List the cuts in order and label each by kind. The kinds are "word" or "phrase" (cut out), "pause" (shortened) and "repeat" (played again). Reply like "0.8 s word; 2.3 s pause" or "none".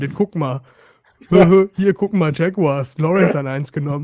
3.0 s word

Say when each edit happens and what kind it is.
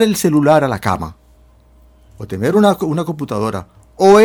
none

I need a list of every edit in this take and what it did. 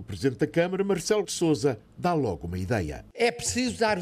1.2 s word

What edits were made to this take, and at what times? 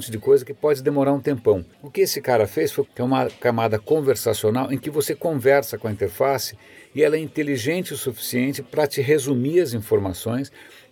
1.7 s pause; 2.8 s phrase

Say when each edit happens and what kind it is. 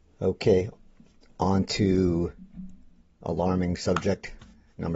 3.0 s pause

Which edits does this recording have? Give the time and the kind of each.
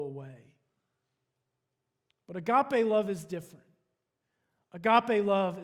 none

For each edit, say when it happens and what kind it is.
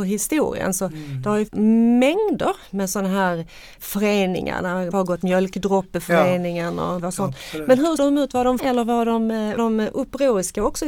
1.5 s word; 3.8 s word; 4.9 s word; 5.2 s word; 7.0 s word; 8.0 s word; 8.6 s word; 9.6 s word

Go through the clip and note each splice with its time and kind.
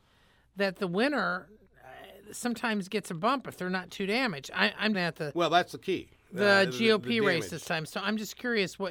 4.9 s phrase

